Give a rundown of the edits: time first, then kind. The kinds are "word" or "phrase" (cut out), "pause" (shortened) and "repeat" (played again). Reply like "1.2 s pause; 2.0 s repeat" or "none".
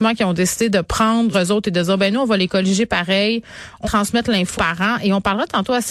1.3 s word; 3.8 s word; 4.6 s word